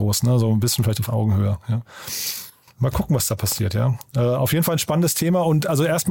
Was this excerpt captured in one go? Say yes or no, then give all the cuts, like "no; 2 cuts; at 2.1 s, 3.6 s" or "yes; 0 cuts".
yes; 0 cuts